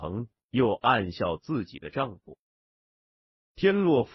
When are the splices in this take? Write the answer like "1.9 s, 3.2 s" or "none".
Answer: none